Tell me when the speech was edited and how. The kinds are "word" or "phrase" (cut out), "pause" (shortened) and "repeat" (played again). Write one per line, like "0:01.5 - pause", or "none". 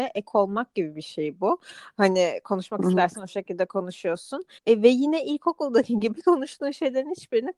0:04.6 - pause